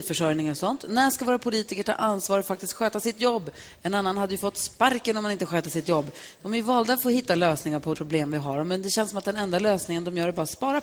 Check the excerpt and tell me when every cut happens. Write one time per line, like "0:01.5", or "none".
0:07.9